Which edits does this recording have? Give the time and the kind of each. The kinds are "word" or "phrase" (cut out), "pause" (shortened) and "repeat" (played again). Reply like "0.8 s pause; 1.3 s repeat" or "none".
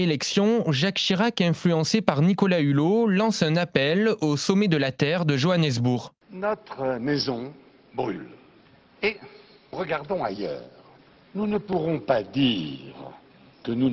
9.7 s word